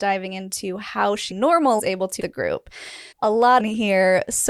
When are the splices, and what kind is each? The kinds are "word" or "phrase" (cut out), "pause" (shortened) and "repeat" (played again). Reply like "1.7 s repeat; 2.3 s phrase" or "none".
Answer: 1.3 s phrase; 1.8 s phrase; 2.2 s word; 3.1 s pause; 3.6 s phrase